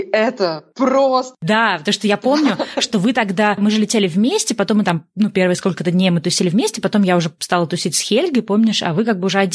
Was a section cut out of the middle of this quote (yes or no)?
no